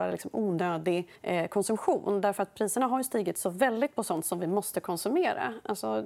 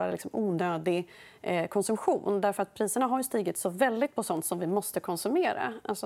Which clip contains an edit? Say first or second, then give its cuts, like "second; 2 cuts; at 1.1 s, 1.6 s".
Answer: first; 1 cut; at 1.2 s